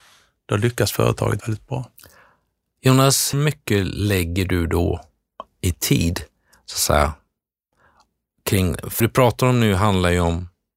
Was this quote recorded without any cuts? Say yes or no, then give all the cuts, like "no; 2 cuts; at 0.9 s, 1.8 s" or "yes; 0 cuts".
no; 3 cuts; at 1.4 s, 3.3 s, 9.0 s